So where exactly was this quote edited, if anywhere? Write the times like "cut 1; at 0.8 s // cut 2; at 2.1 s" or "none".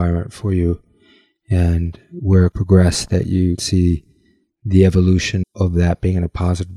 cut 1; at 2.5 s // cut 2; at 3.6 s // cut 3; at 5.4 s